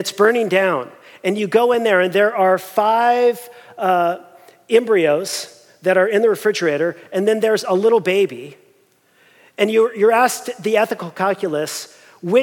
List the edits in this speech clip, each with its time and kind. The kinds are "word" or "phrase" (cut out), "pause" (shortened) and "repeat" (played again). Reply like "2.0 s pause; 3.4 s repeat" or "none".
none